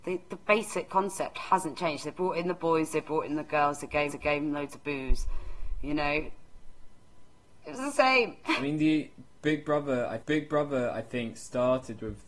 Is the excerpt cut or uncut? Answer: cut